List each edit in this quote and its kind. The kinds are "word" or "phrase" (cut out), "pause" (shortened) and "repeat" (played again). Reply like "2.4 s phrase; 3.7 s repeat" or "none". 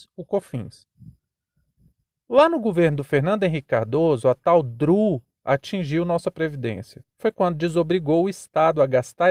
7.1 s pause